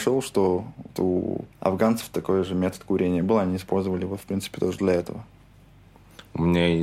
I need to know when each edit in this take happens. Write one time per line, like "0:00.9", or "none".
0:01.5